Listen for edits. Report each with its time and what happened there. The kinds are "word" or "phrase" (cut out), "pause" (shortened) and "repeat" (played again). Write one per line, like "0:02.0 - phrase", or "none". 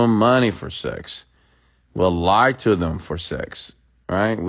none